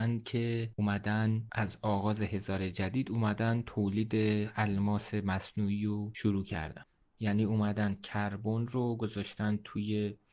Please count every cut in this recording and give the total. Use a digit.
0